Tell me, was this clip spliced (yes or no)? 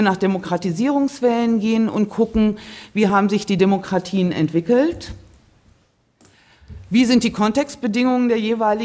no